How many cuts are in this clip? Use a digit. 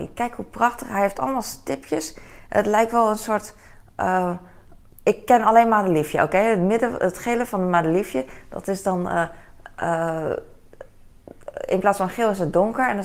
0